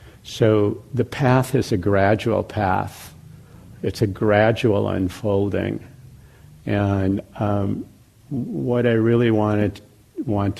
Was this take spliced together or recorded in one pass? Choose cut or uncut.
uncut